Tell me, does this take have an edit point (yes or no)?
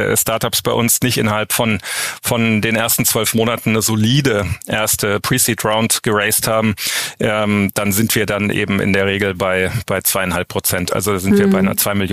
no